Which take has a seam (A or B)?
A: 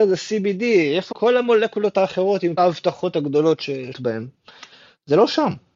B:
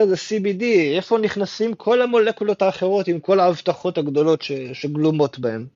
A